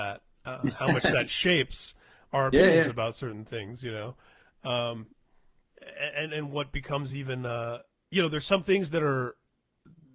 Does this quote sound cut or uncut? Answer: uncut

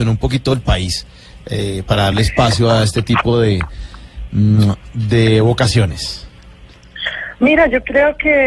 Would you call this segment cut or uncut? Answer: uncut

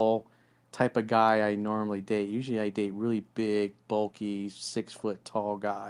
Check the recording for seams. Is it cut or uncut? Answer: uncut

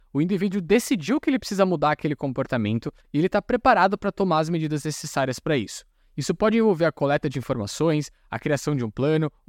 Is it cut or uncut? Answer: uncut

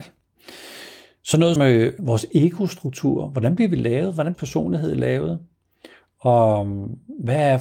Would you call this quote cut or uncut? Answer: cut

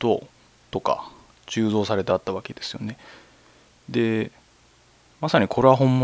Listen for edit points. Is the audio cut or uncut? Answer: uncut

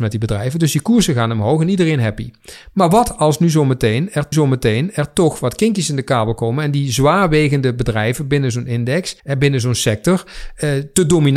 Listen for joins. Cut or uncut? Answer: cut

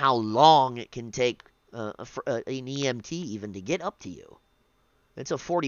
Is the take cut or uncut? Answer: uncut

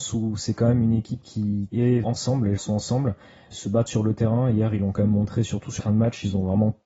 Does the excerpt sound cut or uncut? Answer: cut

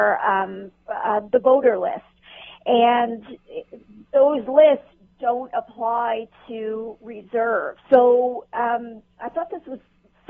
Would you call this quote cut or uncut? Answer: cut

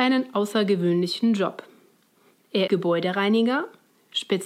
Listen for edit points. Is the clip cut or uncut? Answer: cut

